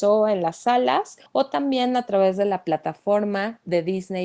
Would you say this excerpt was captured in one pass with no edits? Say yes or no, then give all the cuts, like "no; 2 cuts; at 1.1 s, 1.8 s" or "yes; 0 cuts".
no; 1 cut; at 1.3 s